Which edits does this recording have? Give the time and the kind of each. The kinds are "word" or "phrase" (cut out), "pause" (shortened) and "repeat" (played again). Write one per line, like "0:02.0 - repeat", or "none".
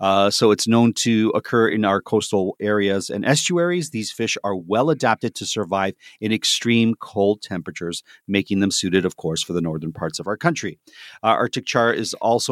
none